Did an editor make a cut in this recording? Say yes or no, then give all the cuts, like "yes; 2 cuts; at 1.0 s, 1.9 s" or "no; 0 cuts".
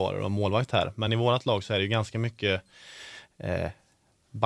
no; 0 cuts